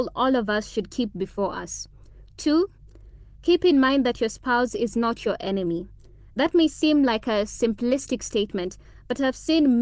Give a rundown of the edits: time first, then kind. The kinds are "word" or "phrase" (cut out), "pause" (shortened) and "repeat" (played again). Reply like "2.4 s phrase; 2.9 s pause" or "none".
none